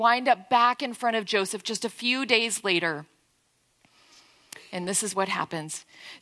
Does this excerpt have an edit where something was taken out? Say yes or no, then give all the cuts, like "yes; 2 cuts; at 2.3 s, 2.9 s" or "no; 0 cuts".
no; 0 cuts